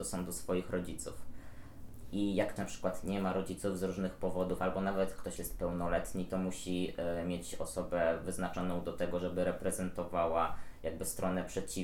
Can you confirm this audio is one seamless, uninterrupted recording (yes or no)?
no